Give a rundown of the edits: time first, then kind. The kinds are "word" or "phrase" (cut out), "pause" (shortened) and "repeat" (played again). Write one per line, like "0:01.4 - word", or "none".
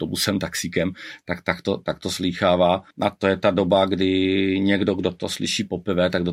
0:02.9 - pause